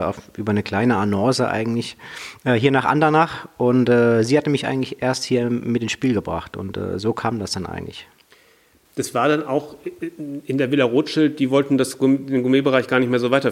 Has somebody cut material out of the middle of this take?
no; 0 cuts

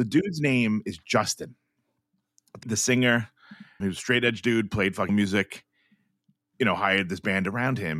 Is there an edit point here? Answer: yes; 3 cuts; at 2.6 s, 3.8 s, 5.1 s

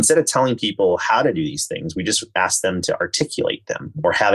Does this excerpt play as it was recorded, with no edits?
yes; 0 cuts

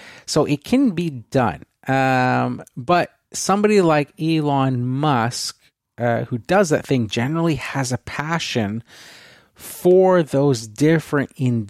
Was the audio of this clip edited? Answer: no; 0 cuts

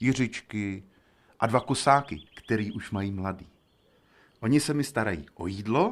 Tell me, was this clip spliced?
yes; 1 cut; at 2.3 s

